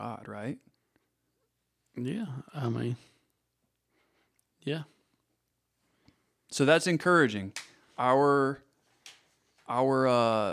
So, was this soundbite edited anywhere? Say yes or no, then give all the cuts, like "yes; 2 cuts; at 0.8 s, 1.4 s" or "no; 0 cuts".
no; 0 cuts